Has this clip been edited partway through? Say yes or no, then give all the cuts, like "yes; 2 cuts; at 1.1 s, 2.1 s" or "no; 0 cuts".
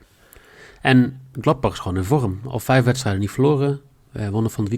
no; 0 cuts